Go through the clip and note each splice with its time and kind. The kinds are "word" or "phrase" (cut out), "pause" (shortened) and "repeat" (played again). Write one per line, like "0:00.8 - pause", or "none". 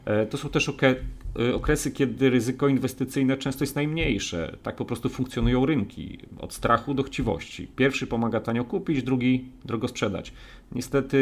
0:07.7 - pause

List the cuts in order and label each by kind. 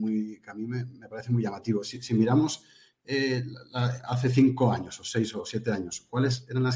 none

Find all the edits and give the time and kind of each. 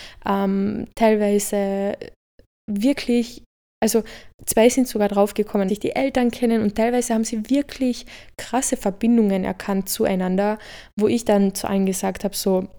0:05.7 - word

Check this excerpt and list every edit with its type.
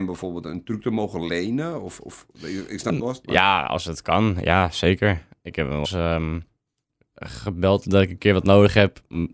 0:02.9 - word
0:05.8 - word
0:07.8 - word

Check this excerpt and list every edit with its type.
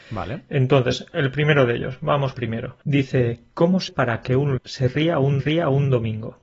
0:02.3 - phrase
0:02.8 - pause
0:03.9 - word
0:04.6 - word
0:05.4 - repeat

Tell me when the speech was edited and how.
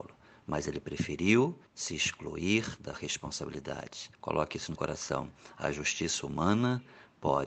0:01.7 - pause
0:02.9 - word
0:04.1 - pause
0:04.7 - word

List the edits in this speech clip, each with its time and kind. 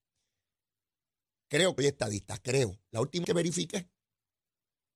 0:01.8 - word
0:03.2 - word

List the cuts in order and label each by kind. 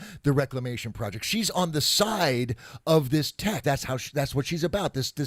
0:03.6 - word

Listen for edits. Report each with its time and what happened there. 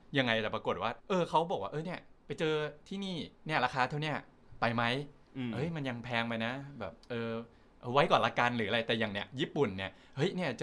0:01.0 - pause
0:03.4 - pause
0:07.0 - pause

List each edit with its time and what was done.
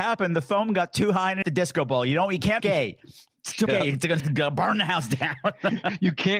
0:01.4 - word
0:02.6 - phrase
0:03.7 - word
0:04.2 - word

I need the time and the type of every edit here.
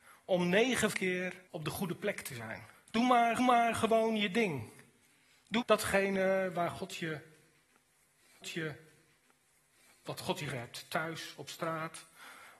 0:00.9 - phrase
0:01.5 - pause
0:02.7 - pause
0:03.4 - repeat
0:05.6 - word
0:08.4 - repeat
0:10.5 - word

